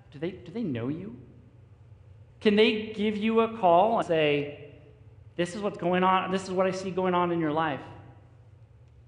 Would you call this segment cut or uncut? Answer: cut